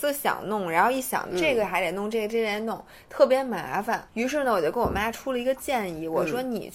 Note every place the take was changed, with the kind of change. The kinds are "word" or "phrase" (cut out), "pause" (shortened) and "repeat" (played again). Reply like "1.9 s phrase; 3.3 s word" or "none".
1.3 s phrase; 4.1 s pause